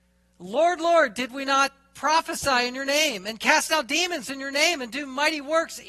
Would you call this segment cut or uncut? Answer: uncut